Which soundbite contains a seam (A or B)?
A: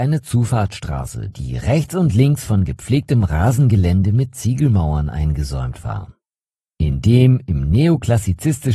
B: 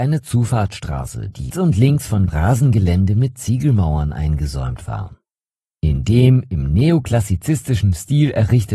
B